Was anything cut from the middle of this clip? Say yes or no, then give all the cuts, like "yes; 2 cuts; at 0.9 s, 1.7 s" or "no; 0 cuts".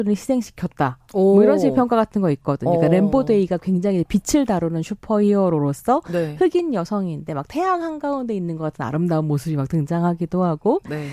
no; 0 cuts